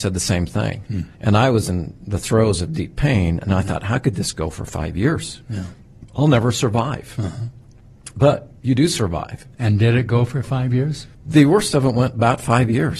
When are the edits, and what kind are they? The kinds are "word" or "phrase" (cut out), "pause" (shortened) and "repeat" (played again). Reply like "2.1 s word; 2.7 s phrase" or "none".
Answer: 1.1 s pause; 6.1 s pause; 8.6 s pause; 9.5 s pause; 11.1 s pause